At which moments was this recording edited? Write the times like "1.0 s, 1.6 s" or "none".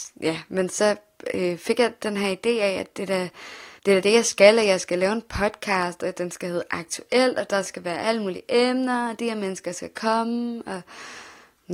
3.8 s